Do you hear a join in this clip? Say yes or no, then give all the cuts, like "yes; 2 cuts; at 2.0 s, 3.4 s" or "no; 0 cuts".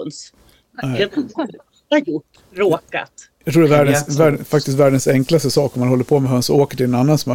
no; 0 cuts